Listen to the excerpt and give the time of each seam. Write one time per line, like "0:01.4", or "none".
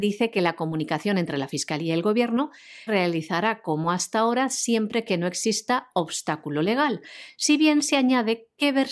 0:02.9